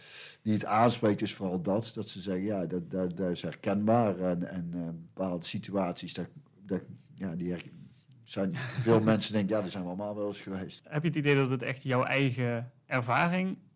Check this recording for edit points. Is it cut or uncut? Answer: uncut